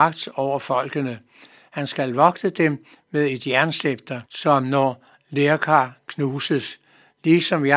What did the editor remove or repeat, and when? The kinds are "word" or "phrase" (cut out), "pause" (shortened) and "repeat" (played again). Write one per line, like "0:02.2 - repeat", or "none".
0:04.3 - pause